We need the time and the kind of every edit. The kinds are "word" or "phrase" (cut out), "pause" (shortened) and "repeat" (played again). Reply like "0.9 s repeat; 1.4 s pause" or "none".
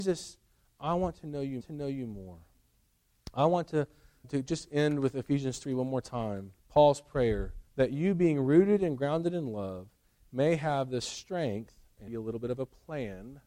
1.6 s repeat; 4.2 s word; 6.6 s pause; 7.7 s pause; 12.1 s word